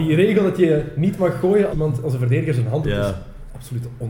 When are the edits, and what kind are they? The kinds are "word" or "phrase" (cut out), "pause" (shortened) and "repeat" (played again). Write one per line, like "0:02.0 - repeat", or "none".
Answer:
0:01.7 - word
0:02.8 - word